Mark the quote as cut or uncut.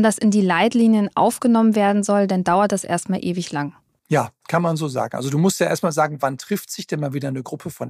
cut